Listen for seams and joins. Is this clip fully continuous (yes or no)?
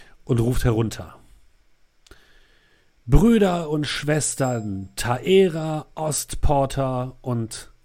yes